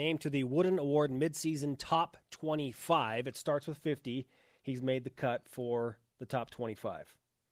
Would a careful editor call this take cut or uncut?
uncut